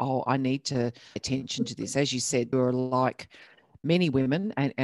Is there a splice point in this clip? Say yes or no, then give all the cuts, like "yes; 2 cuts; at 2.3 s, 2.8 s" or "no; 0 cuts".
yes; 2 cuts; at 1.2 s, 2.5 s